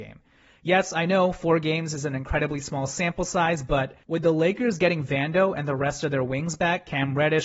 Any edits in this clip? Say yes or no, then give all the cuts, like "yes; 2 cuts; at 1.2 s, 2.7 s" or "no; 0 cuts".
yes; 1 cut; at 4.0 s